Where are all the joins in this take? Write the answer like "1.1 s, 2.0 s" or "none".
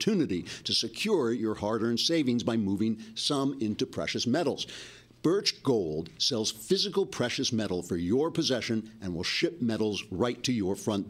none